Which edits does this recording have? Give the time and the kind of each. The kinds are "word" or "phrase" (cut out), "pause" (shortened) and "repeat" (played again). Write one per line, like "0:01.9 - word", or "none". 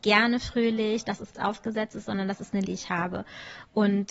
0:01.3 - word
0:02.6 - word

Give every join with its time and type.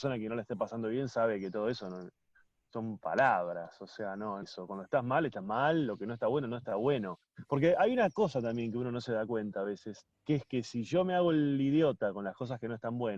0:04.4 - phrase
0:10.1 - pause

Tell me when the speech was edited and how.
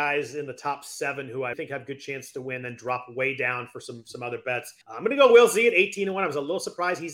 0:01.5 - word
0:04.8 - pause

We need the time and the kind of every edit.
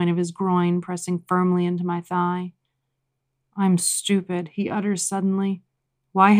0:03.8 - word

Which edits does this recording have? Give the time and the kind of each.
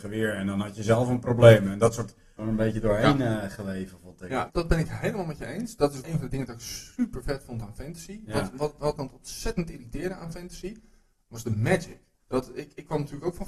0:02.4 - phrase
0:04.5 - word
0:06.0 - word
0:09.0 - phrase
0:12.1 - pause

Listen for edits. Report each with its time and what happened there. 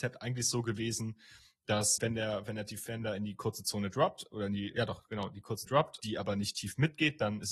0:02.0 - word
0:04.7 - word
0:05.7 - word
0:06.0 - word

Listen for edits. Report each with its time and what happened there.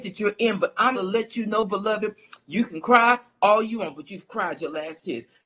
0:00.9 - word

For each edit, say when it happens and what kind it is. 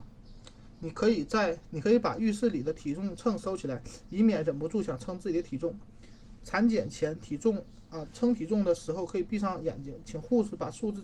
none

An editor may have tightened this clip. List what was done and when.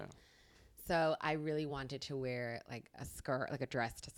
none

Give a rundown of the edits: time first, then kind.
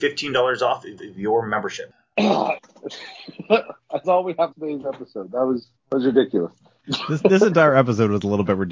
0:01.0 - repeat
0:02.6 - word
0:04.0 - phrase
0:04.5 - word
0:05.8 - pause
0:07.2 - word

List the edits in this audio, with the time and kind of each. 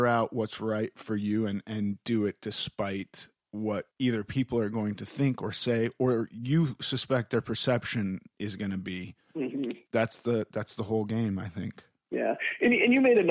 0:03.9 - pause

